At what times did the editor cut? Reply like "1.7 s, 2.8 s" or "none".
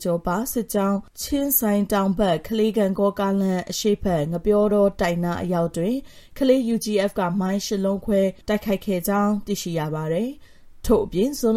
8.4 s